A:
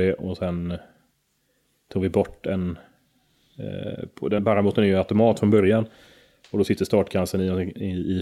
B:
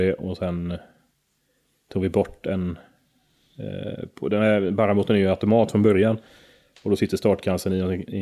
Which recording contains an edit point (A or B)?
A